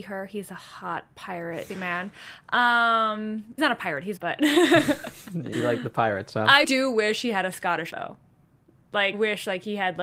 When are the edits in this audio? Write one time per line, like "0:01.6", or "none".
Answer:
0:01.7
0:03.6
0:04.2
0:05.5
0:06.6
0:07.9
0:09.1